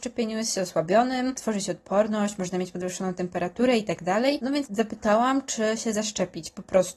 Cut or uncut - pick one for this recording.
uncut